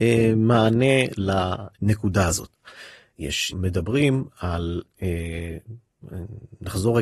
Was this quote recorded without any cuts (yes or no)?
no